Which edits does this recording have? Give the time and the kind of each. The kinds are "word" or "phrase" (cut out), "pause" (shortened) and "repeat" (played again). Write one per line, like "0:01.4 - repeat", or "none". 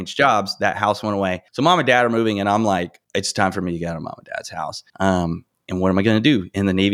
0:01.5 - pause
0:03.0 - pause
0:04.9 - pause